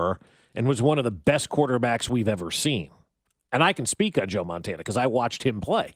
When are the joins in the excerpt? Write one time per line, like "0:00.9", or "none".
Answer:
none